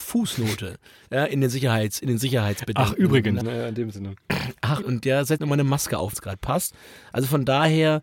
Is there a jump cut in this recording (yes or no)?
yes